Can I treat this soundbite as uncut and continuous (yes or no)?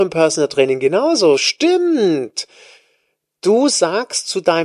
yes